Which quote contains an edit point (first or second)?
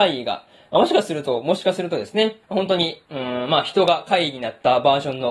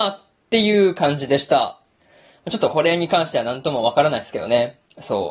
first